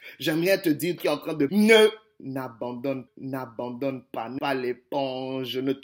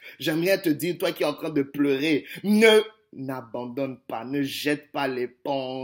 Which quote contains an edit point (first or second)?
first